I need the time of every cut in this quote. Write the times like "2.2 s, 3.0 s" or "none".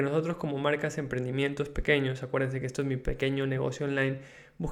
none